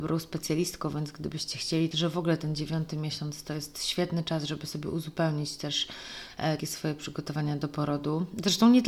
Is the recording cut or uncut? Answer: cut